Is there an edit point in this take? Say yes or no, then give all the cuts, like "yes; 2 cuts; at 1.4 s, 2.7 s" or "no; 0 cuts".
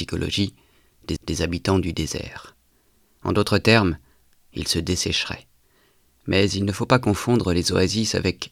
yes; 1 cut; at 1.2 s